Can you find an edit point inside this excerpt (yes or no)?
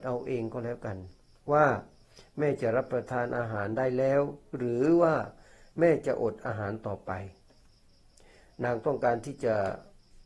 no